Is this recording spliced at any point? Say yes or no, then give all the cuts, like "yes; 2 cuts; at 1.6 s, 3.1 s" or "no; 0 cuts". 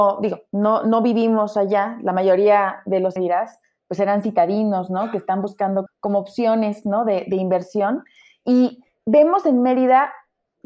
yes; 2 cuts; at 3.2 s, 5.9 s